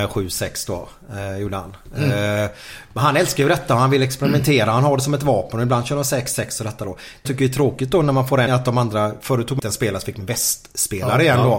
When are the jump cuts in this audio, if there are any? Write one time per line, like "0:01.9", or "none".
0:07.2
0:08.5
0:09.6
0:10.2